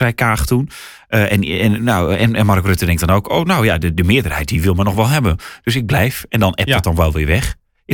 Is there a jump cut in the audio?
no; 0 cuts

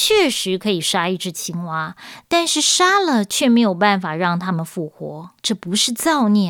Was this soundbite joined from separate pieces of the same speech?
yes; 1 cut; at 5.4 s

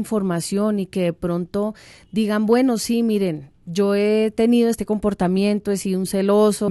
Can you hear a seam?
no; 0 cuts

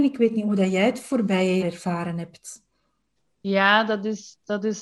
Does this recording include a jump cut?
yes; 2 cuts; at 1.6 s, 3.2 s

